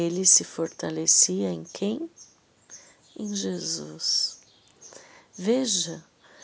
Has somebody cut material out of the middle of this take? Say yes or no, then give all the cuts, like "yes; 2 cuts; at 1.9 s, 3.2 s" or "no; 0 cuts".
no; 0 cuts